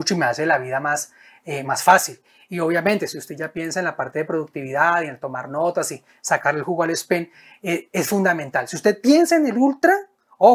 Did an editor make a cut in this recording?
no; 0 cuts

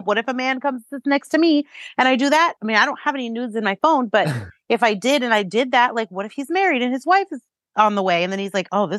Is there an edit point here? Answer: no; 0 cuts

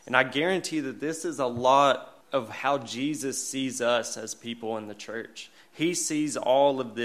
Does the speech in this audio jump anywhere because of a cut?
yes; 1 cut; at 2.2 s

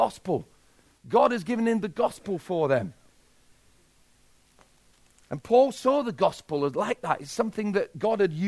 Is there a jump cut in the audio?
no; 0 cuts

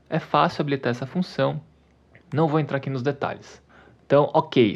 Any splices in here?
no; 0 cuts

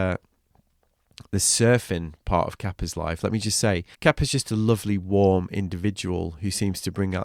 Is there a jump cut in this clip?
yes; 1 cut; at 3.9 s

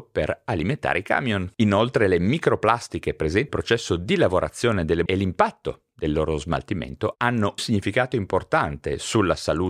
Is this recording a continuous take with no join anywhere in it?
no; 3 cuts; at 3.5 s, 5.1 s, 7.6 s

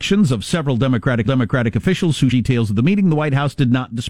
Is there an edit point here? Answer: yes; 2 cuts; at 1.2 s, 2.3 s

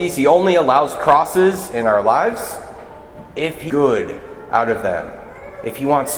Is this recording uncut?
no; 1 cut; at 3.7 s

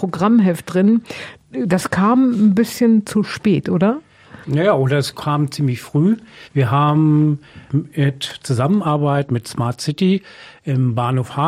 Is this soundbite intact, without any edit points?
no; 3 cuts; at 4.4 s, 6.5 s, 7.7 s

